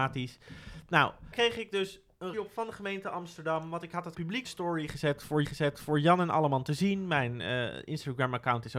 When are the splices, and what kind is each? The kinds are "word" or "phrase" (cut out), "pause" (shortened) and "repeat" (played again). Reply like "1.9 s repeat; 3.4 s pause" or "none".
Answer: 1.3 s word; 2.3 s phrase; 4.1 s word; 4.4 s phrase; 5.4 s repeat